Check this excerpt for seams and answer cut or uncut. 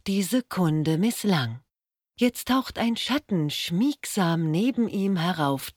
cut